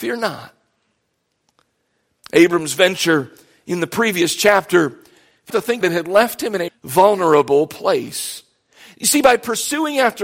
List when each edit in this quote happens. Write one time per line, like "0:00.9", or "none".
0:05.5
0:05.8
0:06.7